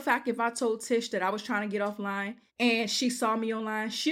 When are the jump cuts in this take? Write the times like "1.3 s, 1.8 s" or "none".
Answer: 2.5 s